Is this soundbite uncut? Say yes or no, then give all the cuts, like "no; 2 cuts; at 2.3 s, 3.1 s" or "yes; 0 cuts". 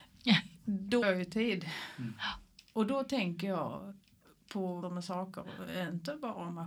no; 2 cuts; at 1.0 s, 4.8 s